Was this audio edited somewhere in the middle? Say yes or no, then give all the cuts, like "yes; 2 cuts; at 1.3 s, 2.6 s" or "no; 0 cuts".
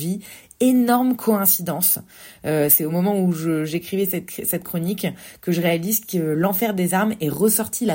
no; 0 cuts